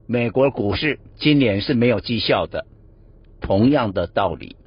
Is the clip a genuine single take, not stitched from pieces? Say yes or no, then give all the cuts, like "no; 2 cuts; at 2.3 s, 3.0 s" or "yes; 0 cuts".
no; 1 cut; at 1.1 s